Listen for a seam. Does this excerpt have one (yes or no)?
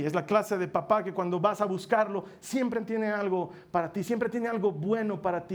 no